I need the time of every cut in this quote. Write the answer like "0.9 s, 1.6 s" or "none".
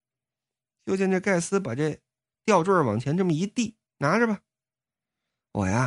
3.9 s